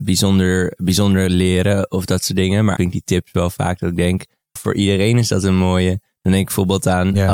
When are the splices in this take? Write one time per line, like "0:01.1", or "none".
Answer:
0:02.8
0:04.6